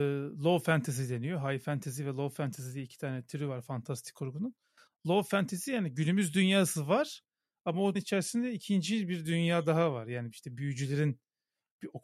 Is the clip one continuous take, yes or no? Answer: no